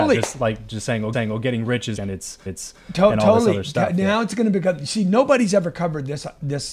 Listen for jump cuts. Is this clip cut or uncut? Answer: cut